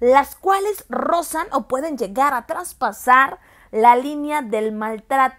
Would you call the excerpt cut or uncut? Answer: uncut